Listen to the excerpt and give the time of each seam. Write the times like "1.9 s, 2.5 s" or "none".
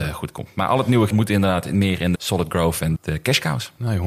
1.1 s, 2.1 s, 3.0 s